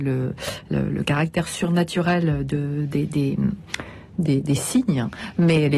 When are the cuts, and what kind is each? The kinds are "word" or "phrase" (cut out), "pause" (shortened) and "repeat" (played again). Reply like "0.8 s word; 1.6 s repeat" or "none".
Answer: none